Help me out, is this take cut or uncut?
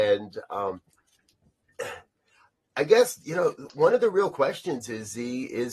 uncut